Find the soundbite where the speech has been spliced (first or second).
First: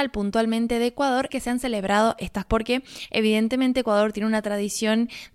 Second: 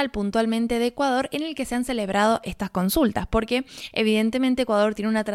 first